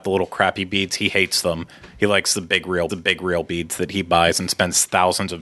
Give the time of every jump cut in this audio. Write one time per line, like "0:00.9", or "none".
0:02.9